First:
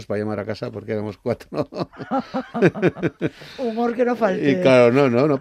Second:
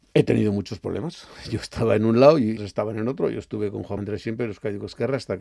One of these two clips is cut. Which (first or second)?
second